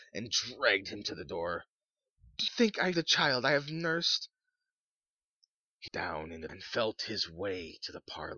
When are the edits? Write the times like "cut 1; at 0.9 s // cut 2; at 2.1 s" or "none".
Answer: cut 1; at 2.5 s // cut 2; at 2.9 s // cut 3; at 5.9 s // cut 4; at 6.5 s